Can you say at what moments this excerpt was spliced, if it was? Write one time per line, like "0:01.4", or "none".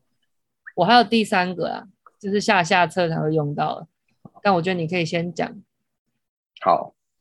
0:02.0